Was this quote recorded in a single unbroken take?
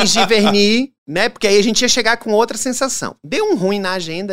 no; 1 cut; at 1.0 s

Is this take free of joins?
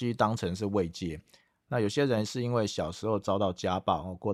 yes; 0 cuts

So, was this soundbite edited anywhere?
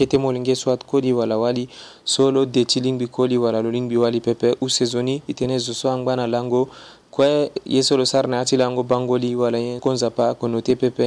yes; 1 cut; at 9.8 s

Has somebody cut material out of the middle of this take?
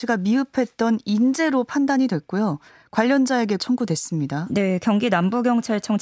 yes; 1 cut; at 3.6 s

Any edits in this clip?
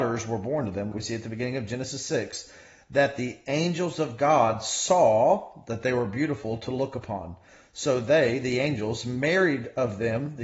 yes; 1 cut; at 0.9 s

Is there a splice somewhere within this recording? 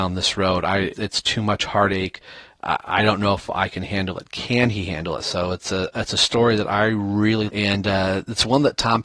yes; 2 cuts; at 0.9 s, 7.5 s

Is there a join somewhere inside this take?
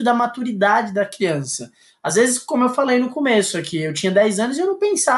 no; 0 cuts

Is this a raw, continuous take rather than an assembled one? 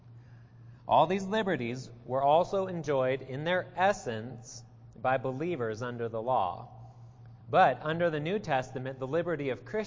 yes; 0 cuts

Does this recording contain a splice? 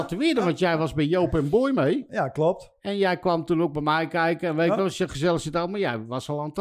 no; 0 cuts

